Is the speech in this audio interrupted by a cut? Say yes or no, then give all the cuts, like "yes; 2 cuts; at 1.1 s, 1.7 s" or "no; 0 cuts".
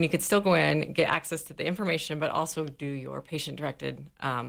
no; 0 cuts